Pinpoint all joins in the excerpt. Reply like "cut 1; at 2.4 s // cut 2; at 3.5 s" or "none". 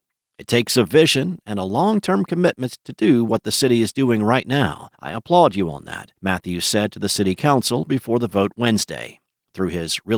cut 1; at 4.9 s // cut 2; at 6.2 s